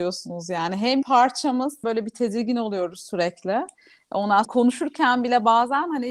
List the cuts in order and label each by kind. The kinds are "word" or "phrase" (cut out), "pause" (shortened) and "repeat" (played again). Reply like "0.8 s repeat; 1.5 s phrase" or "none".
1.0 s word; 1.8 s word; 4.4 s word